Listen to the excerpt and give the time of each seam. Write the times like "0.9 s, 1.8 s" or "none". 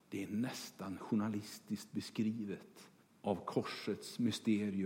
3.0 s